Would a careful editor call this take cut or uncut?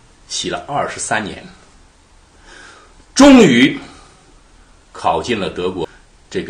uncut